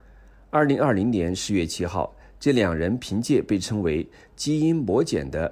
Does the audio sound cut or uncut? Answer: uncut